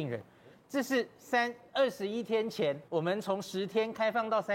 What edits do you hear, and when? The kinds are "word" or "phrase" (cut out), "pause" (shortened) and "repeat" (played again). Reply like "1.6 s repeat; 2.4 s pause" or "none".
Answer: 2.9 s pause